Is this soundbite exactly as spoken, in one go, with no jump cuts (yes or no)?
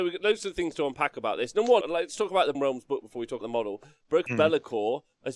no